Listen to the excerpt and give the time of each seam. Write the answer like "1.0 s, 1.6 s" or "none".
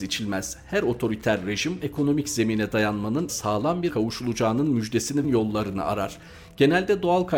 1.8 s, 3.3 s, 3.9 s, 5.2 s